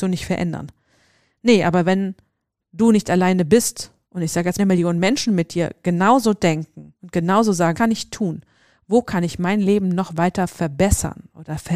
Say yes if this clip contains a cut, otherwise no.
yes